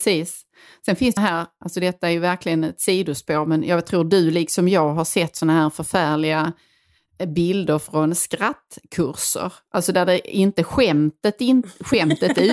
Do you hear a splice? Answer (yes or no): yes